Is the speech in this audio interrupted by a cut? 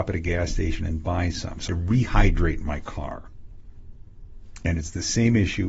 yes; 1 cut; at 1.7 s

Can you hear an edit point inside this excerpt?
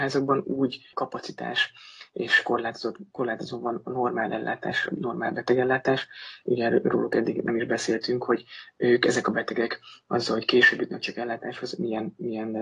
yes; 1 cut; at 0.9 s

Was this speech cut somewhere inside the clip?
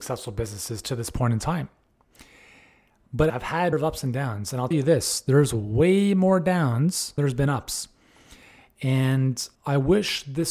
yes; 5 cuts; at 3.3 s, 3.7 s, 4.7 s, 7.2 s, 9.5 s

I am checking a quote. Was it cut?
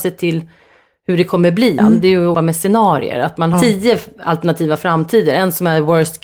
yes; 3 cuts; at 1.8 s, 2.3 s, 3.5 s

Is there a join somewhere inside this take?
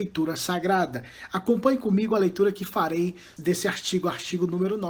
yes; 1 cut; at 3.4 s

